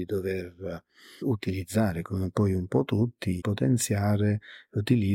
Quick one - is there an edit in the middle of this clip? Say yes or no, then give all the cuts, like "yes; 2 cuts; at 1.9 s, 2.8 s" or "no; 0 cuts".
yes; 2 cuts; at 1.2 s, 3.4 s